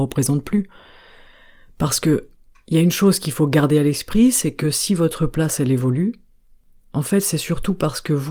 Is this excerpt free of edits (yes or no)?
yes